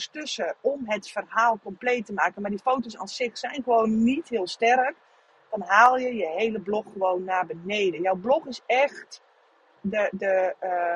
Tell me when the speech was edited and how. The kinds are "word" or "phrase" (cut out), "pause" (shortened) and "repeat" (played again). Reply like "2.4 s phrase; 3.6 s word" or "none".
none